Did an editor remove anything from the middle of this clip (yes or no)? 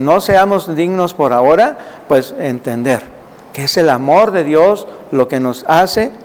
no